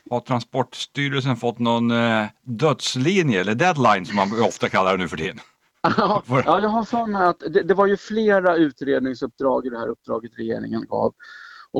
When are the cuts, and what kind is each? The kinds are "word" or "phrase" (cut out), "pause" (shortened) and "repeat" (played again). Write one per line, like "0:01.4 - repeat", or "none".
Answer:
none